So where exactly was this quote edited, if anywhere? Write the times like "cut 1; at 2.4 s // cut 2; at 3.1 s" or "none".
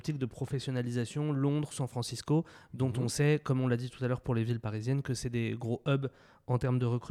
none